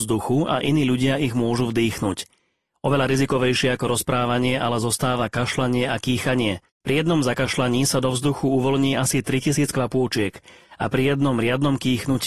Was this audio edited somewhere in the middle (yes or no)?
no